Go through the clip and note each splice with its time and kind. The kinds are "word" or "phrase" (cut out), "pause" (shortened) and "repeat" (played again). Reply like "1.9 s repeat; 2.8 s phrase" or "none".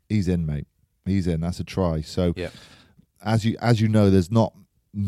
none